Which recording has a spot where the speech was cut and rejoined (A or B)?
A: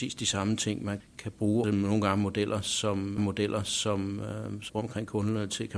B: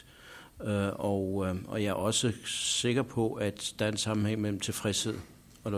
A